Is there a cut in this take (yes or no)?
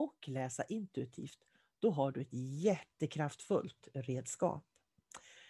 no